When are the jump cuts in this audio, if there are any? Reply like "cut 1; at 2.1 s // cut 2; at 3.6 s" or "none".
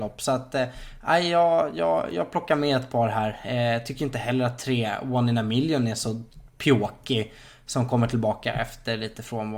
none